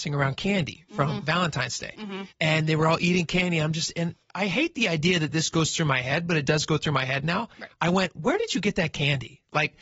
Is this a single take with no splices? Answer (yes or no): no